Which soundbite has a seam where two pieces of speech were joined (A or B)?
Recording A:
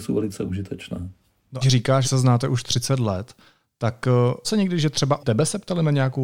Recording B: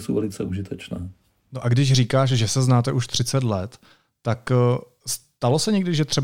A